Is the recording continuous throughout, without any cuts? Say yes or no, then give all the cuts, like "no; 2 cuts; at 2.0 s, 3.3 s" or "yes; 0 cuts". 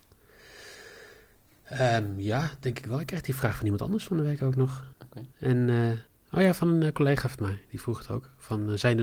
no; 3 cuts; at 4.9 s, 5.3 s, 6.1 s